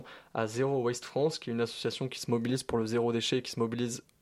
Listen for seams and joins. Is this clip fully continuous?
yes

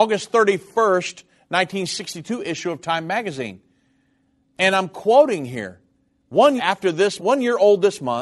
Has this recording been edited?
yes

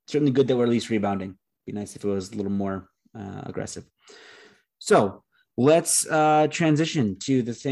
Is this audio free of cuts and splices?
yes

